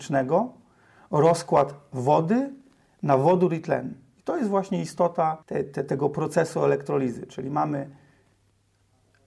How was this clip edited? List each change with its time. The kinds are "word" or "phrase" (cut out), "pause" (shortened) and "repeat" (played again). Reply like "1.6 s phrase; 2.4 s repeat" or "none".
5.4 s pause